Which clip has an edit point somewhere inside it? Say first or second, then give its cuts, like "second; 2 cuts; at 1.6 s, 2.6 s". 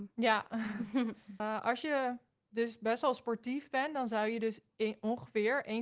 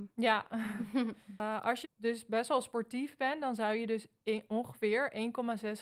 second; 1 cut; at 1.8 s